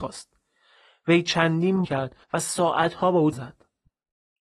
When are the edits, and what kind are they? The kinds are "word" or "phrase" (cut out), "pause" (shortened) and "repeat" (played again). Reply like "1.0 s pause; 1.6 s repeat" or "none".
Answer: 1.8 s phrase; 2.2 s pause; 3.3 s word

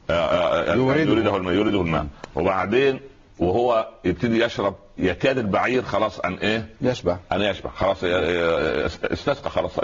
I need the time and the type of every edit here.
none

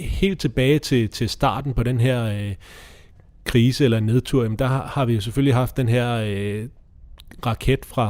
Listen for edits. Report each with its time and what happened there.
none

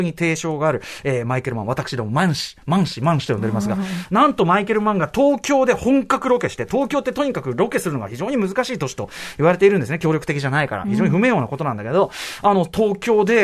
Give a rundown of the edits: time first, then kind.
none

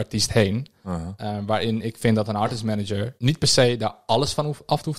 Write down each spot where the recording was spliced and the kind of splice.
3.2 s pause

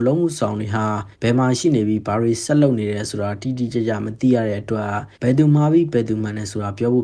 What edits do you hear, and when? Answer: 1.1 s pause; 5.1 s pause

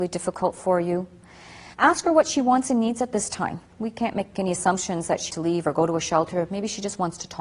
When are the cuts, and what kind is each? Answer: 1.7 s pause; 3.7 s pause; 4.3 s phrase; 5.3 s word

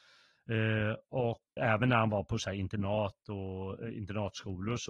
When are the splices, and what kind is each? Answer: 1.6 s word

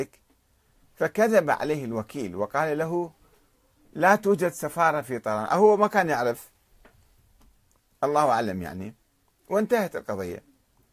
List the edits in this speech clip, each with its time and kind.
none

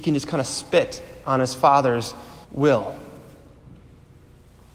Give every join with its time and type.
2.4 s pause

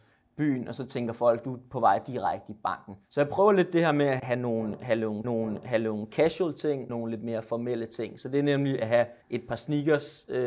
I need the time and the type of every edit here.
3.0 s pause; 4.2 s word; 5.2 s repeat; 6.9 s phrase; 9.2 s pause

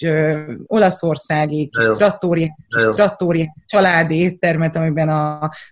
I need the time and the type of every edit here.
2.7 s repeat

